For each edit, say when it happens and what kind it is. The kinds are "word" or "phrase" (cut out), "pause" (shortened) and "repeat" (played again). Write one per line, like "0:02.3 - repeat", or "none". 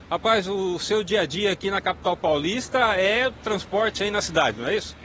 none

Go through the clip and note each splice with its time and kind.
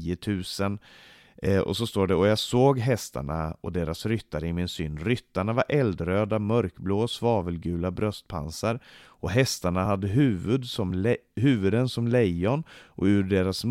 none

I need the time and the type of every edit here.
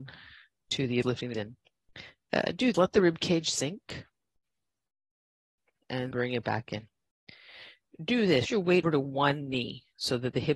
0:01.0 - word
0:01.3 - word
0:02.7 - word
0:06.1 - word
0:08.4 - word
0:08.8 - word

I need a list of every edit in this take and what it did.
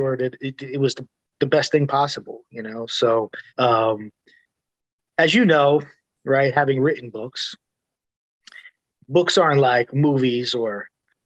0:03.5 - pause

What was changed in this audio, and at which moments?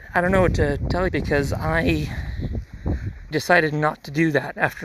0:01.1 - word
0:03.3 - word

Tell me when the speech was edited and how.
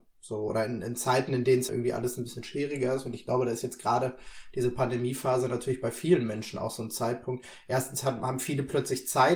0:01.7 - word

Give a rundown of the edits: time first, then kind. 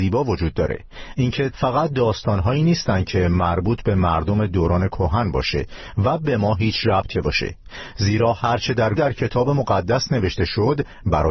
0:01.5 - phrase
0:07.1 - word
0:09.0 - word

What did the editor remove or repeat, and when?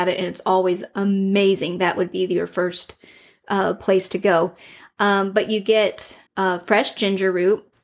0:06.3 - pause

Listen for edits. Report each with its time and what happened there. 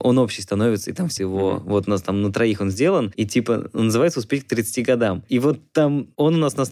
0:01.2 - word

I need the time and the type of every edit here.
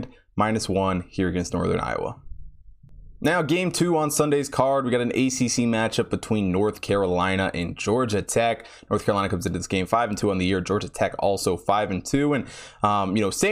none

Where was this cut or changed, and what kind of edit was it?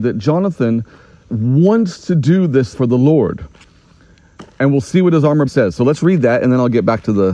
0:01.3 - word
0:02.7 - word
0:05.5 - word

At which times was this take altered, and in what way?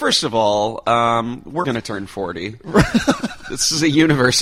0:01.6 - word

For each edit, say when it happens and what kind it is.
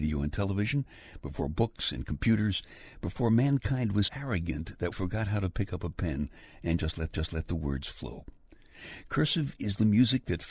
0:04.1 - word
0:04.9 - word
0:07.1 - repeat

